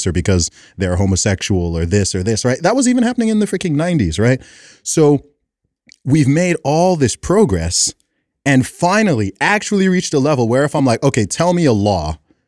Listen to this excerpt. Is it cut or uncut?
uncut